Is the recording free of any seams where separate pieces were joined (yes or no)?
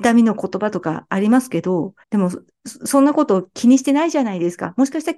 no